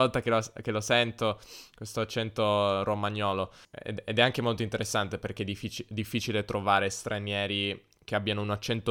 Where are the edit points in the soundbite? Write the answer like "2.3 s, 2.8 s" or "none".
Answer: none

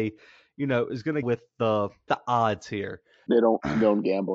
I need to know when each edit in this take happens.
1.2 s, 2.1 s, 3.3 s

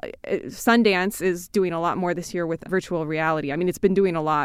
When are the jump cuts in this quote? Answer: 2.6 s

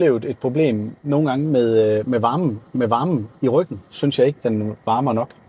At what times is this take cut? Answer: 1.0 s, 2.7 s

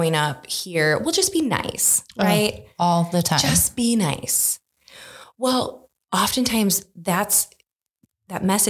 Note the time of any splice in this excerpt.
none

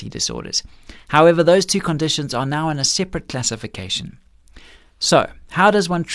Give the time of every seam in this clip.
none

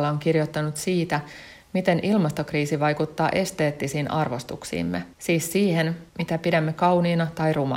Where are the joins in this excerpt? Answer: 5.1 s, 6.1 s

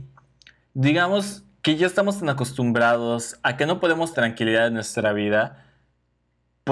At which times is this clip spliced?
4.1 s

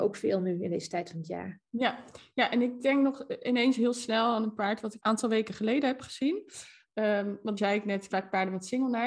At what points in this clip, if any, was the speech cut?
5.0 s, 7.6 s, 8.1 s

